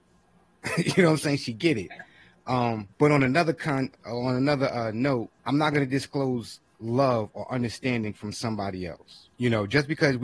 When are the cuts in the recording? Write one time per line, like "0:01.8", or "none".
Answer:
0:02.9
0:05.4
0:09.3